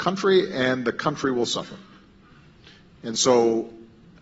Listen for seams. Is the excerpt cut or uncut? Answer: uncut